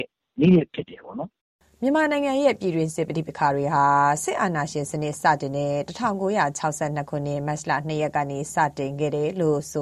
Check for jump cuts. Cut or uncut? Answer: uncut